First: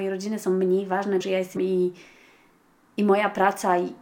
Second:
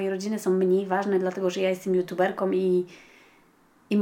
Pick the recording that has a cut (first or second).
first